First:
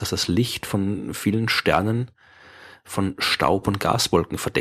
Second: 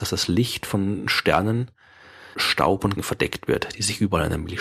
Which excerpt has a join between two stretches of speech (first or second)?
second